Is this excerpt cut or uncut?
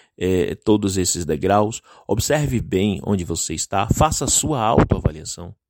uncut